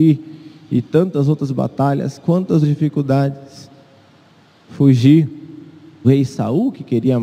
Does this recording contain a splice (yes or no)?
yes